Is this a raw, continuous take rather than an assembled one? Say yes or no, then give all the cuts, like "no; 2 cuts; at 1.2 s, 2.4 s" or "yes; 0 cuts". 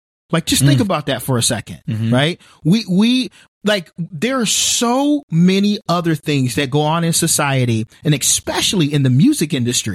yes; 0 cuts